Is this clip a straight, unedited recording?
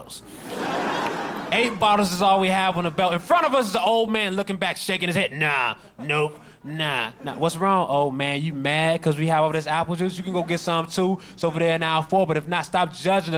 yes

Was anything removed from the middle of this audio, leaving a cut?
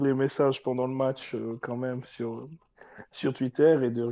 no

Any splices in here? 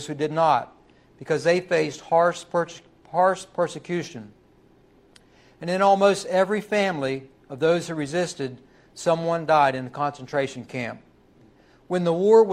no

